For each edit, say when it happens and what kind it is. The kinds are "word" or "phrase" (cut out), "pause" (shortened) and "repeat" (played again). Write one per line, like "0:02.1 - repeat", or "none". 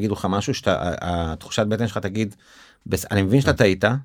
none